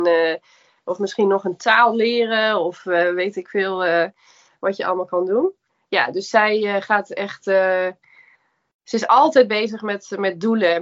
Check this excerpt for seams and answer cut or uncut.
uncut